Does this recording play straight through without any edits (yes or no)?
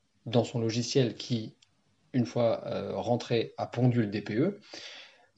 no